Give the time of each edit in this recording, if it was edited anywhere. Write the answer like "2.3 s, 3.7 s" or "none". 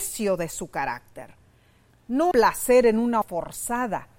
2.3 s, 3.2 s